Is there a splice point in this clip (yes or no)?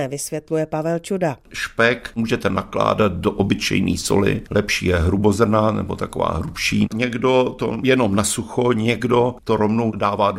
yes